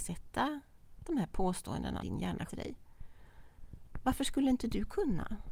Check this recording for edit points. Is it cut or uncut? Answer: cut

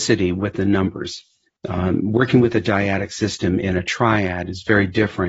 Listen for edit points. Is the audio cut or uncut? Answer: uncut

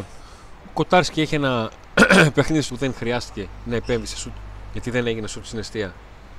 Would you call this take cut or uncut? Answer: cut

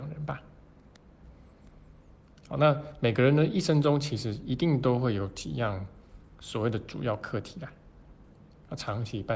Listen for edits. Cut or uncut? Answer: uncut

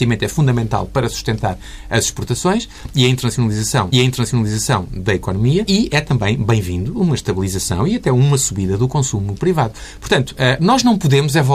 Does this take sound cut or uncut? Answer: cut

